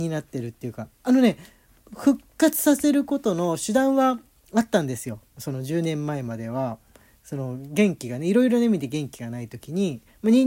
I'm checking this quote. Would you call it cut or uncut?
uncut